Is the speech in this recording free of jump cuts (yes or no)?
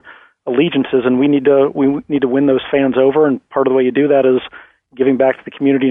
yes